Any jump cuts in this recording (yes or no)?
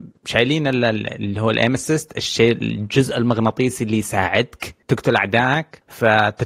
yes